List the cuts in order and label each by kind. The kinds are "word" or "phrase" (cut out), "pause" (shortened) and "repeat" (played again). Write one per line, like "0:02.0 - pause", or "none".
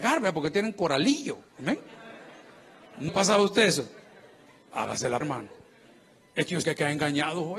0:03.1 - word
0:05.2 - word
0:06.6 - word